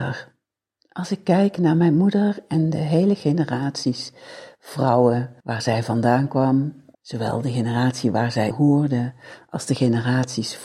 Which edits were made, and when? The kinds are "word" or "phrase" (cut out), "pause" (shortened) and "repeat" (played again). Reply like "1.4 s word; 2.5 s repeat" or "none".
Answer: 5.4 s pause; 6.9 s pause; 8.5 s word